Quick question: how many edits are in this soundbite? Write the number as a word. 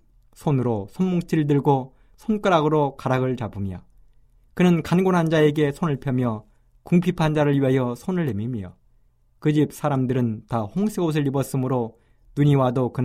zero